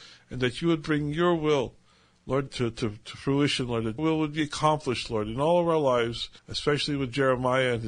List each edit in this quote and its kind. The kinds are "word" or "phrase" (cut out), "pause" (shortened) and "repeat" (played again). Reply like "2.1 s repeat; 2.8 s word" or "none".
2.5 s word; 4.0 s word; 6.4 s pause